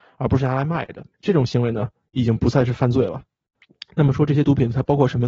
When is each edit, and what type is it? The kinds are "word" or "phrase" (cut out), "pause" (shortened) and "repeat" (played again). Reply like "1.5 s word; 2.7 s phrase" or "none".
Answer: 1.1 s pause